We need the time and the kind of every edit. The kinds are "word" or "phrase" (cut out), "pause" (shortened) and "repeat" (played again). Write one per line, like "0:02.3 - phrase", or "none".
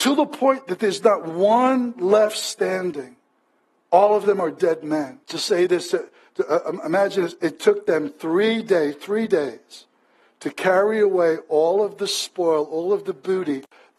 0:05.2 - pause